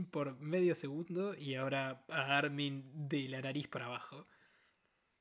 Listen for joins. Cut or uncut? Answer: uncut